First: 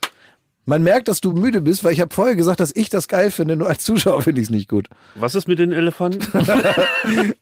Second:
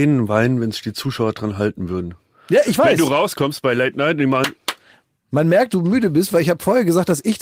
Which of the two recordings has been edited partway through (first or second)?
second